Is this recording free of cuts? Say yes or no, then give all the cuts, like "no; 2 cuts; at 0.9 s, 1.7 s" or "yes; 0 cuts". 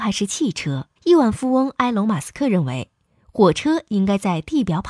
no; 1 cut; at 1.0 s